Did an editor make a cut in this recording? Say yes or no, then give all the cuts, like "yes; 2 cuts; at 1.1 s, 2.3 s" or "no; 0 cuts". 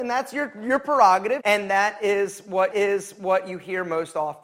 yes; 2 cuts; at 1.4 s, 2.7 s